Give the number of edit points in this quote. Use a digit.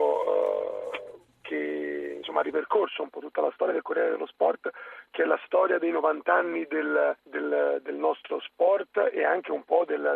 2